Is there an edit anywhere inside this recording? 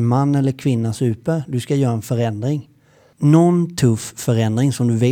yes; 1 cut; at 0.9 s

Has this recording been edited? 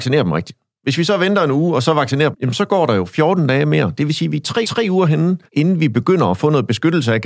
yes; 3 cuts; at 2.3 s, 4.6 s, 5.5 s

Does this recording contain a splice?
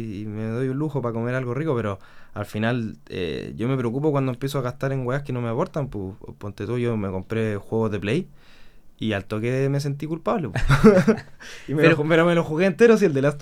no; 0 cuts

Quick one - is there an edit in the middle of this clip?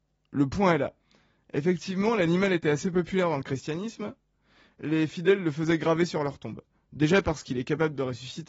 no; 0 cuts

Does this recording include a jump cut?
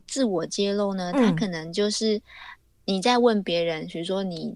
no; 0 cuts

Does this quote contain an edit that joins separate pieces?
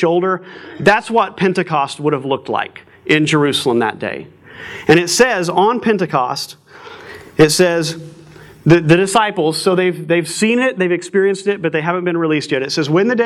no; 0 cuts

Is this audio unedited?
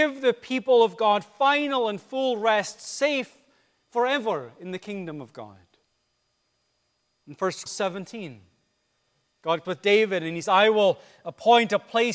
no; 3 cuts; at 7.7 s, 9.6 s, 10.4 s

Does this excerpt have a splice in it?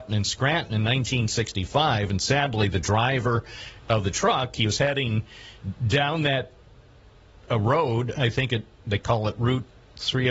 no; 0 cuts

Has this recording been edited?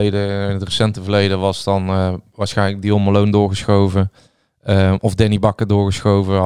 no; 0 cuts

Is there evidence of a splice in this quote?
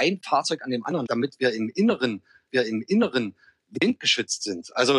yes; 2 cuts; at 1.1 s, 2.5 s

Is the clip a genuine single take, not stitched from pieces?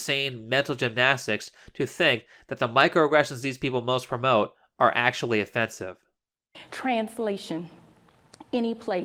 yes; 0 cuts

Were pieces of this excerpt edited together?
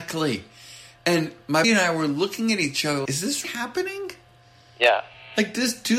yes; 3 cuts; at 1.6 s, 3.0 s, 3.4 s

